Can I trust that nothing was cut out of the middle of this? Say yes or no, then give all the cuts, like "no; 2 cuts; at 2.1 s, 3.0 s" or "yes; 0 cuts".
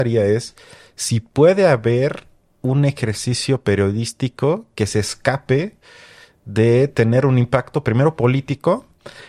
yes; 0 cuts